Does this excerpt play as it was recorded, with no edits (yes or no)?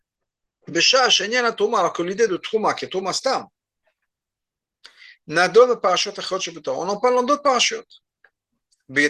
yes